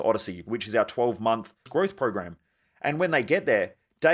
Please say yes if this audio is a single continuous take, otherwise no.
no